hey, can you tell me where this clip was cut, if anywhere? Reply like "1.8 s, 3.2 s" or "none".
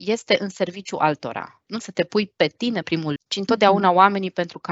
1.8 s, 2.8 s, 3.2 s